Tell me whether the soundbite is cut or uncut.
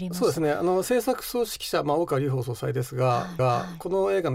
cut